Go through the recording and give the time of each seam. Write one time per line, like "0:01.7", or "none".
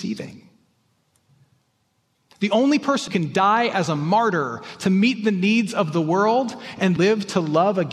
0:03.1
0:07.0